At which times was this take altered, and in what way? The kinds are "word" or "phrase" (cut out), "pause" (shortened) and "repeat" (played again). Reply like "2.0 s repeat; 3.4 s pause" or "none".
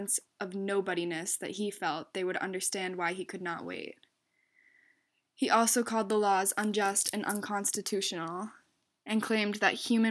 none